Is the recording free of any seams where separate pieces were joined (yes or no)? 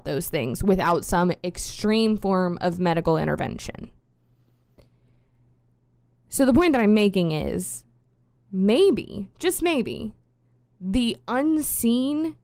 yes